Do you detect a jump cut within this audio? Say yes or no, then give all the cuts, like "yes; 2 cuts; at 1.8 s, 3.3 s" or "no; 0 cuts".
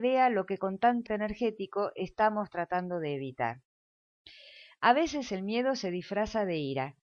yes; 1 cut; at 1.1 s